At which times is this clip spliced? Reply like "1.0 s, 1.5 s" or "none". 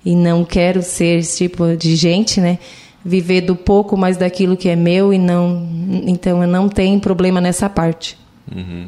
none

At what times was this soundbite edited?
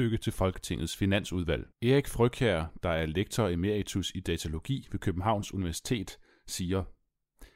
1.7 s

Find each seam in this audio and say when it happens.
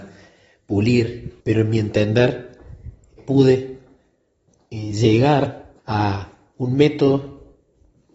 1.4 s, 3.2 s, 5.8 s

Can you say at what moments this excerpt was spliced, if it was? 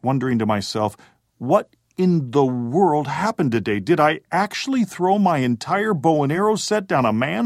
none

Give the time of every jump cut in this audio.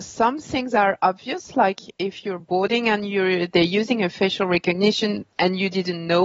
none

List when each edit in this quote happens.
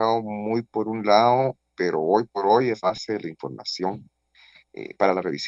1.7 s, 2.3 s, 2.8 s

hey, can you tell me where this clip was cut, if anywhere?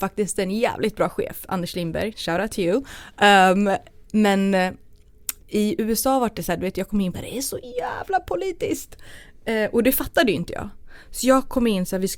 2.1 s, 5.4 s, 7.1 s

